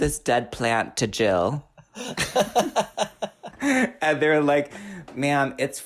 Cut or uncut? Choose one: cut